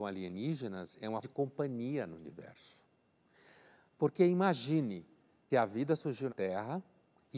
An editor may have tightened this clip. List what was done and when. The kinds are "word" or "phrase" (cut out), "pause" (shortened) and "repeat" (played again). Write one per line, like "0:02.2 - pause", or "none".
0:01.2 - word
0:05.5 - word
0:06.3 - word